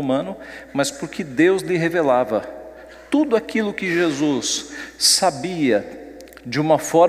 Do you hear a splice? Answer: no; 0 cuts

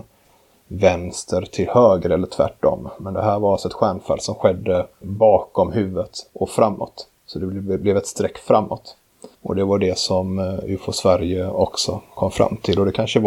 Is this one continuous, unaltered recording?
no; 3 cuts; at 4.9 s, 7.2 s, 9.3 s

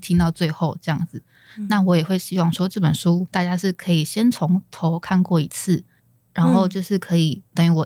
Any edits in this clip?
yes; 2 cuts; at 3.3 s, 6.0 s

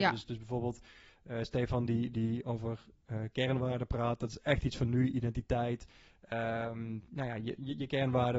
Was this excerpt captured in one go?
yes; 0 cuts

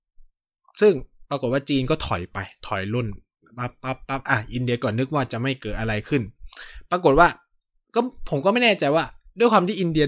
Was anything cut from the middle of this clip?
no; 0 cuts

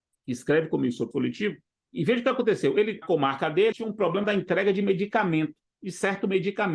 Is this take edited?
yes; 5 cuts; at 1.1 s, 1.9 s, 3.0 s, 3.7 s, 4.2 s

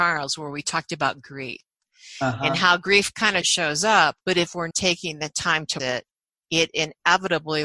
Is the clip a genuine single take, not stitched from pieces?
no; 4 cuts; at 3.4 s, 4.2 s, 4.7 s, 5.8 s

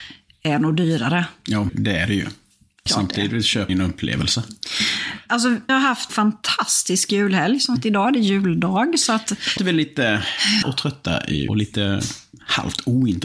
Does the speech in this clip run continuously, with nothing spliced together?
no; 9 cuts; at 1.7 s, 2.9 s, 3.7 s, 5.7 s, 6.1 s, 7.8 s, 9.6 s, 10.6 s, 11.5 s

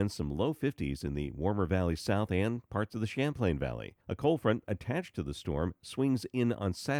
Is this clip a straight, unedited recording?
no; 1 cut; at 4.0 s

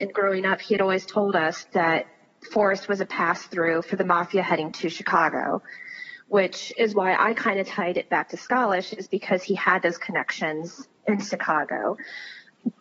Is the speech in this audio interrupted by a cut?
no; 0 cuts

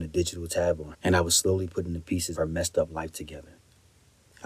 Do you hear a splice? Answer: yes; 2 cuts; at 0.9 s, 2.4 s

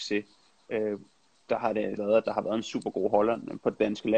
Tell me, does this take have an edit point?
yes; 1 cut; at 2.0 s

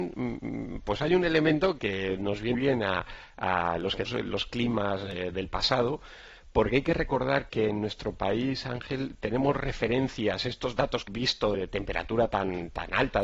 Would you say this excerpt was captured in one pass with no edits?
no; 6 cuts; at 1.8 s, 2.5 s, 4.1 s, 7.5 s, 11.1 s, 11.5 s

